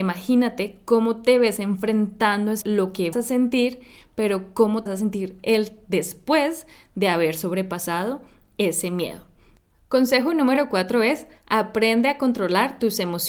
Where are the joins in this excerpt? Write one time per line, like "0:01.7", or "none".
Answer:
0:02.6
0:03.1
0:04.9